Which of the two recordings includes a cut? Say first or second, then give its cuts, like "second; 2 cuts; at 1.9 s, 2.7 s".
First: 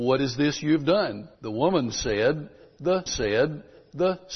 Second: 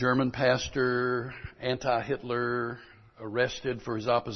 first; 2 cuts; at 1.3 s, 3.1 s